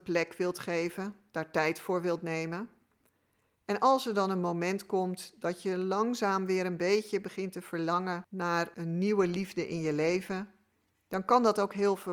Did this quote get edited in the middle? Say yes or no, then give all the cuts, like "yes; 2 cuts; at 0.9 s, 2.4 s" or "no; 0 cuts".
no; 0 cuts